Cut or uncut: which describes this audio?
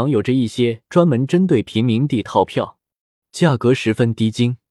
uncut